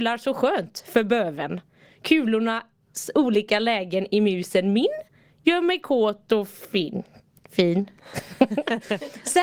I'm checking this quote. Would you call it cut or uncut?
uncut